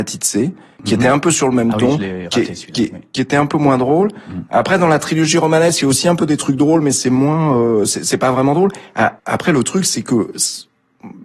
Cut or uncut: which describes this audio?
cut